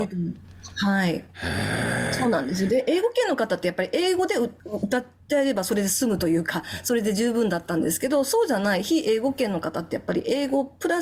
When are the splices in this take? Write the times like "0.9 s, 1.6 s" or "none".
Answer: none

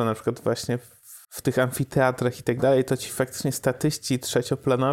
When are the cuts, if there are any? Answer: 1.2 s

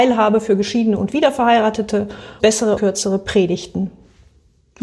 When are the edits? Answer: 2.4 s, 2.8 s

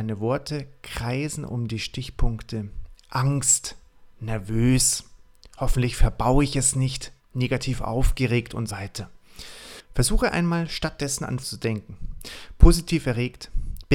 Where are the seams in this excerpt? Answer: 4.1 s, 7.2 s, 8.7 s, 11.4 s

